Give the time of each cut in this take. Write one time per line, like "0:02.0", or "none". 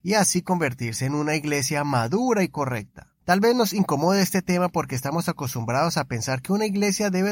0:03.2